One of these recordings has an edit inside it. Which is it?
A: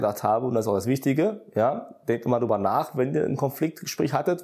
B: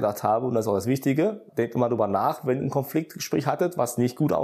B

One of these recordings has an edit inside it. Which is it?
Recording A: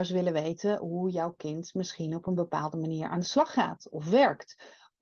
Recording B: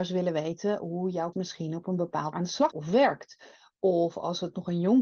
B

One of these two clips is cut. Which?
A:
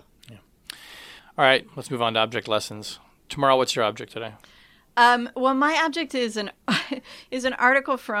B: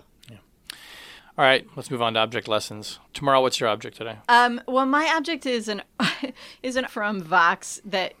B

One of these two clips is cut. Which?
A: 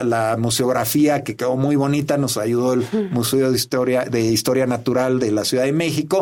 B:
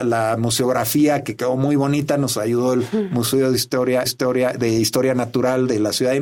B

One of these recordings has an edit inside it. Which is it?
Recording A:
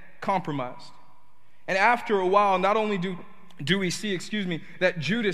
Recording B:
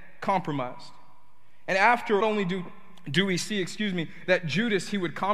B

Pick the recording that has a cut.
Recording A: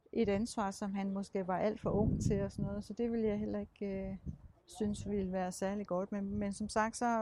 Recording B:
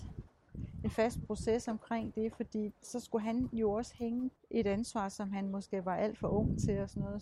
B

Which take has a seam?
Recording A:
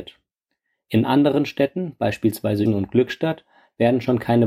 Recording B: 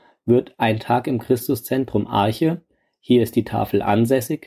A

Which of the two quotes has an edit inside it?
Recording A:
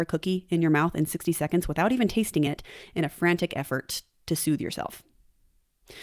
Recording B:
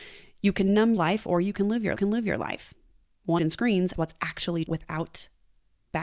B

